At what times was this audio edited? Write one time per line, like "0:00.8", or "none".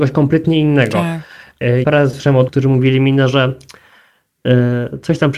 0:01.8
0:02.5

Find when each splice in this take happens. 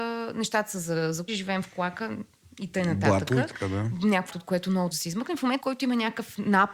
0:01.3
0:04.3
0:04.9
0:05.6

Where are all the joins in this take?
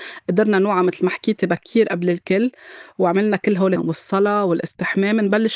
0:03.8

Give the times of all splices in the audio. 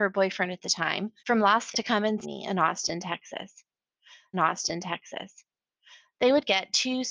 0:01.2
0:01.7
0:02.2
0:04.3

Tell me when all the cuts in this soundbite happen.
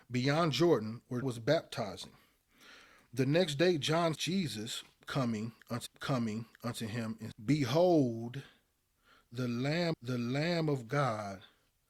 0:01.2
0:04.1
0:05.9
0:07.3
0:09.9

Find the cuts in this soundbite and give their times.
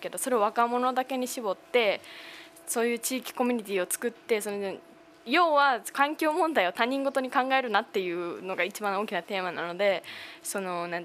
0:05.0

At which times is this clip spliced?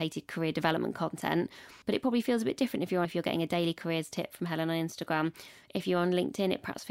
0:01.8
0:03.0

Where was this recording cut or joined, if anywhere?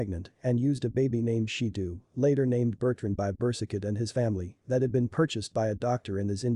0:01.7

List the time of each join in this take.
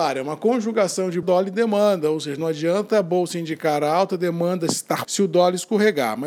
0:01.2
0:05.0

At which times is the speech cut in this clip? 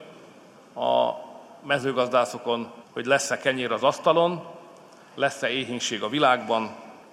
0:02.8

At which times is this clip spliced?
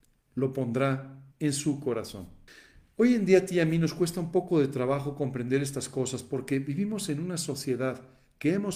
0:01.3
0:02.5

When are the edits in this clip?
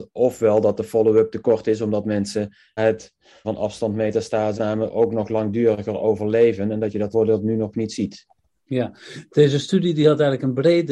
0:02.8
0:03.4
0:04.6
0:07.1

